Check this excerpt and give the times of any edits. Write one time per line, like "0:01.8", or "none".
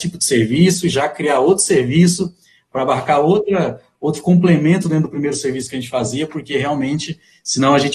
none